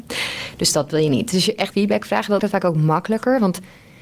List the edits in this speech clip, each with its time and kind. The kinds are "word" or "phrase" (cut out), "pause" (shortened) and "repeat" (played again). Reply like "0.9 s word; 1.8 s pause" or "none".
1.7 s word; 2.4 s word